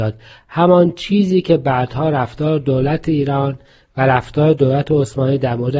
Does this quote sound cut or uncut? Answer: uncut